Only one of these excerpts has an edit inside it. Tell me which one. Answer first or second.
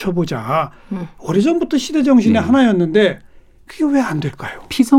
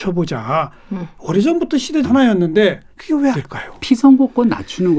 second